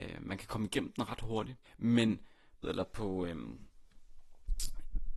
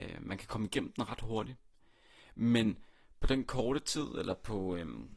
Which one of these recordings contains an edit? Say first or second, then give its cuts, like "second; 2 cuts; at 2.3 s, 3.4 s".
first; 2 cuts; at 1.6 s, 2.6 s